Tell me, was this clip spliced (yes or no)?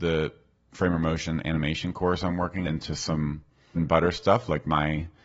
yes